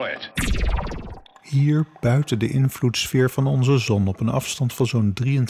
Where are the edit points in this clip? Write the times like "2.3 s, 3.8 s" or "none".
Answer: none